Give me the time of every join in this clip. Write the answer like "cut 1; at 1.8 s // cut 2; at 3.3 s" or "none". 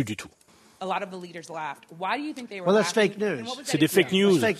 none